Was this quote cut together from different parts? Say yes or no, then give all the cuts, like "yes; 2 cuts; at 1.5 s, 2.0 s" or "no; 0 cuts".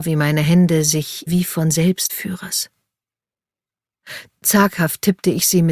yes; 2 cuts; at 1.3 s, 2.1 s